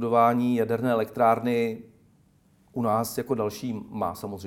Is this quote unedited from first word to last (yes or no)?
yes